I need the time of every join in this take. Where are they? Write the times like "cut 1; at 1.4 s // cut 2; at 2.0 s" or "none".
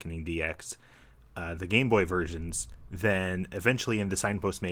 none